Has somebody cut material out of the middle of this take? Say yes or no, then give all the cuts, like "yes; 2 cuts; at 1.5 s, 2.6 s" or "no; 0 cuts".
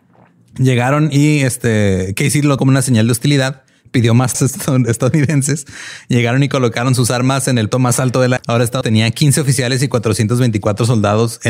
yes; 5 cuts; at 2.6 s, 4.3 s, 7.7 s, 8.4 s, 8.8 s